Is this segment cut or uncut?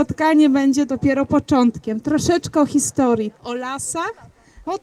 cut